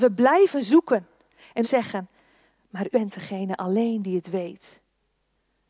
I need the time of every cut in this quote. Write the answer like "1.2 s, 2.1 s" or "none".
1.6 s, 2.9 s

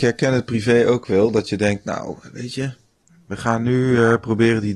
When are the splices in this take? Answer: none

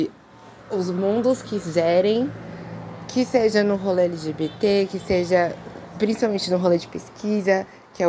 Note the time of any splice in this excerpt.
none

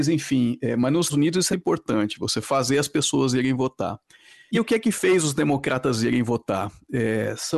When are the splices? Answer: 1.1 s, 1.5 s, 4.5 s

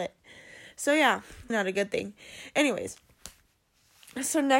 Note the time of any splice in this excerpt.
1.5 s

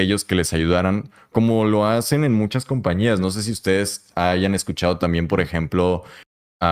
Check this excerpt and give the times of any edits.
none

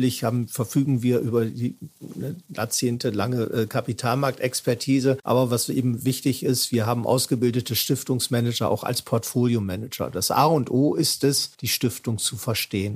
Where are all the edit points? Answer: 11.5 s

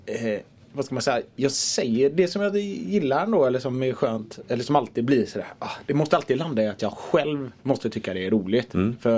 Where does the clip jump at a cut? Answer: 7.6 s

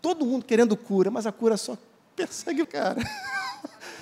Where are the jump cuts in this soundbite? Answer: 2.6 s

